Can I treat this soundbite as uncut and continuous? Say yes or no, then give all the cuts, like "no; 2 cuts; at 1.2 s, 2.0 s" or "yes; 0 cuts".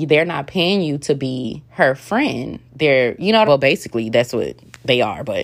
no; 3 cuts; at 1.7 s, 2.7 s, 3.4 s